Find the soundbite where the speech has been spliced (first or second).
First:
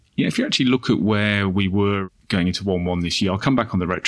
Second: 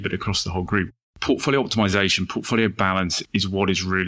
second